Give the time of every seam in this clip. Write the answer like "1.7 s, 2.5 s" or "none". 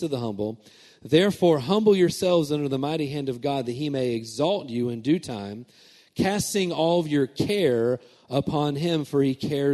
none